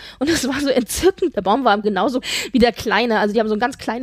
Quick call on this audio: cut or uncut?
cut